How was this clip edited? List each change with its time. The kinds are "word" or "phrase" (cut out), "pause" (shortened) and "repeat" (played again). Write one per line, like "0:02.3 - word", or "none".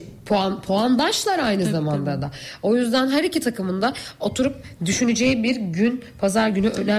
none